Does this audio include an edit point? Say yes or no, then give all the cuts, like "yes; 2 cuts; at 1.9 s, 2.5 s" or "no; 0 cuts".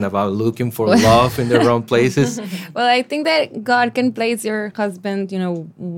no; 0 cuts